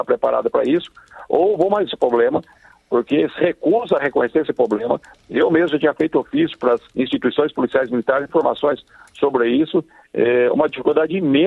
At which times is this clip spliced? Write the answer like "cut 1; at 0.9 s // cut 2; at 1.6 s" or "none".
cut 1; at 1.9 s // cut 2; at 4.0 s // cut 3; at 6.9 s // cut 4; at 8.3 s